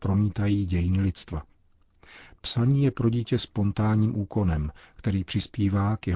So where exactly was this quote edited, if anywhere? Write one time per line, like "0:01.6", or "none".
none